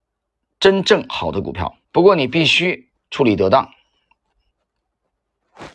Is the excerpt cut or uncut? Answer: cut